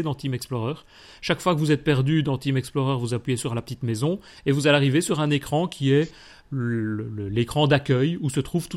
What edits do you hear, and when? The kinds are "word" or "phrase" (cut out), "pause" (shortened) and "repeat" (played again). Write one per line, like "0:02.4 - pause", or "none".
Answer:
none